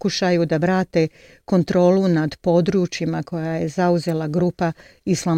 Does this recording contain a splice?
no; 0 cuts

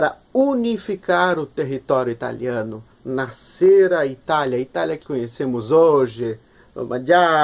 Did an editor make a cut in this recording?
yes; 1 cut; at 5.0 s

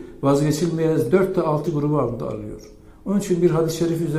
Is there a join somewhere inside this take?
yes; 2 cuts; at 1.1 s, 1.7 s

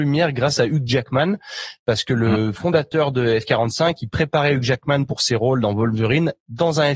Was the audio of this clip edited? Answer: no; 0 cuts

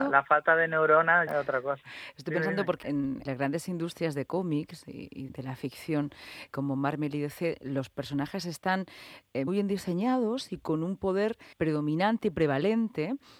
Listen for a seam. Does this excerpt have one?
yes; 7 cuts; at 1.3 s, 2.8 s, 3.2 s, 5.3 s, 6.5 s, 9.5 s, 11.5 s

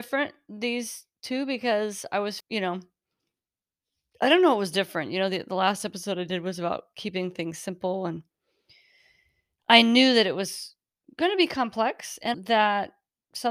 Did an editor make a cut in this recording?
yes; 2 cuts; at 2.4 s, 12.3 s

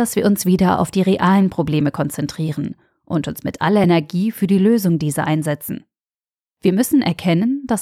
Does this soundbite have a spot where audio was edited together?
no; 0 cuts

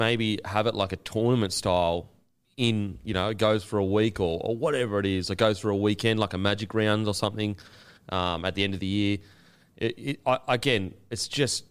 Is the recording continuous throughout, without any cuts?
yes; 0 cuts

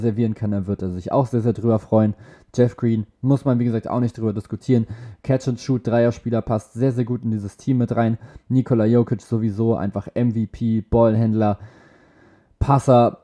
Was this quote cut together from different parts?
no; 0 cuts

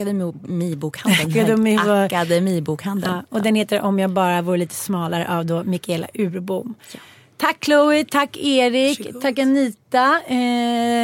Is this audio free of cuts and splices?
yes; 0 cuts

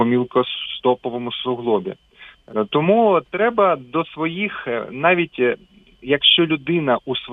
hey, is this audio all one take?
yes; 0 cuts

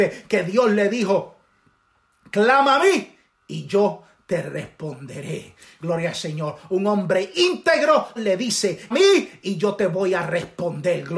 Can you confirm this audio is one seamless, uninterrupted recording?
no; 2 cuts; at 8.2 s, 8.9 s

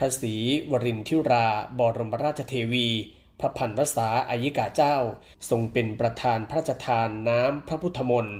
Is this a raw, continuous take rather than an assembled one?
yes; 0 cuts

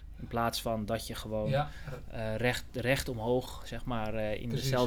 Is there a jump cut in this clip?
no; 0 cuts

